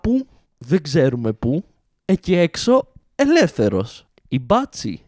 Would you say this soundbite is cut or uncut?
uncut